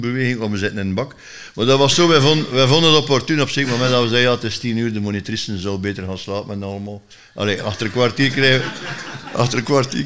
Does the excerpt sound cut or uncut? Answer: uncut